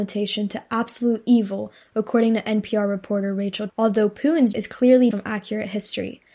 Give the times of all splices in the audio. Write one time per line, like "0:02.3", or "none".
0:03.7
0:04.5
0:05.1